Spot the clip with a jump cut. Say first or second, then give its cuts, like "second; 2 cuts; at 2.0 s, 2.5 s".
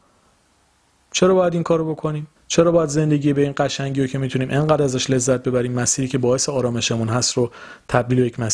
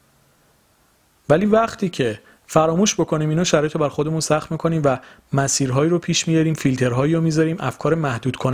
first; 1 cut; at 2.4 s